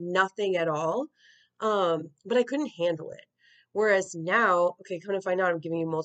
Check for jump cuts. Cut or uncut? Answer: uncut